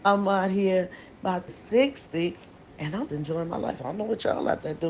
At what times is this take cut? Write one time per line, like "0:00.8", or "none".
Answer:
0:01.5
0:03.1